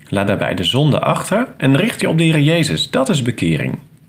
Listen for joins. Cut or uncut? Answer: uncut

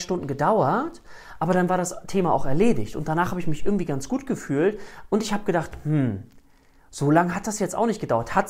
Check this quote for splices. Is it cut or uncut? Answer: uncut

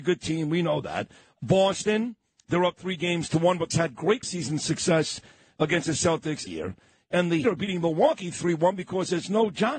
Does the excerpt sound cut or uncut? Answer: cut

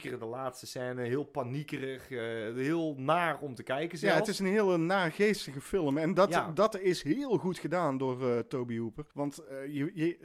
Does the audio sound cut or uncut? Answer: cut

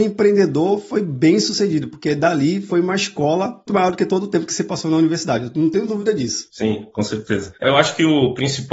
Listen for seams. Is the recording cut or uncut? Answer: cut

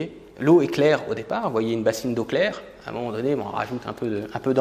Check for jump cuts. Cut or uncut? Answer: uncut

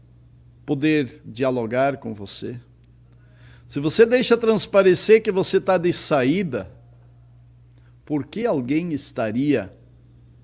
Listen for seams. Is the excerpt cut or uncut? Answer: uncut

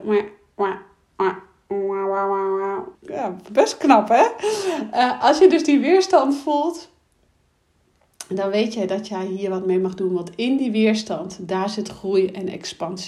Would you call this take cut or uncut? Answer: cut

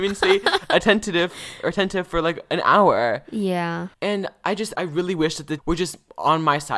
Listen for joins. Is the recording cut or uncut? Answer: cut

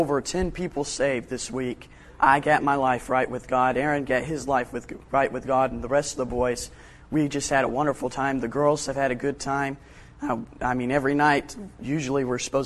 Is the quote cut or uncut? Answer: uncut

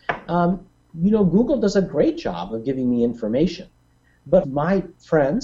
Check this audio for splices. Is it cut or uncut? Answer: cut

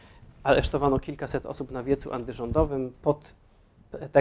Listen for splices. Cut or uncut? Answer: uncut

